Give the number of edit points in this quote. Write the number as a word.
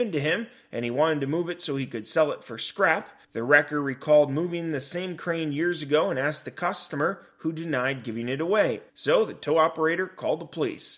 two